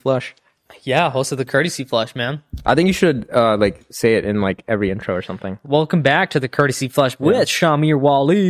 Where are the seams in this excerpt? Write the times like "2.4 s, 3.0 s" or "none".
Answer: 7.2 s